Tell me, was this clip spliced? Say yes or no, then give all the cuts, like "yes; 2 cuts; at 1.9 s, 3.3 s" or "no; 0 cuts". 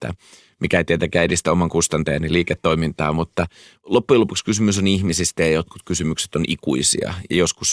no; 0 cuts